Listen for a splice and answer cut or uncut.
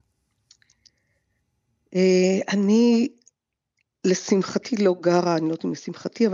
uncut